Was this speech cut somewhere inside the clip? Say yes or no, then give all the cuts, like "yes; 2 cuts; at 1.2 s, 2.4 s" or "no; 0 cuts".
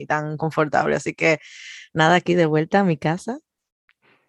no; 0 cuts